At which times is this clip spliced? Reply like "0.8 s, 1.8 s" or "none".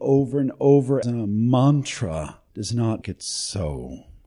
1.0 s, 2.5 s, 3.0 s